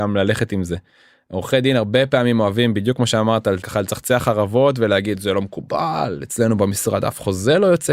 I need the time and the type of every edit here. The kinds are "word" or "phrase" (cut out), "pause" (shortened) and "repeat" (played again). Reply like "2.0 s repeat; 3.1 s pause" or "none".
3.6 s word